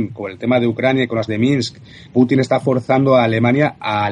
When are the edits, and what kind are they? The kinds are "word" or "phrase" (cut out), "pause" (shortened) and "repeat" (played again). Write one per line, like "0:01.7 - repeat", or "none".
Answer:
0:01.3 - word
0:02.1 - word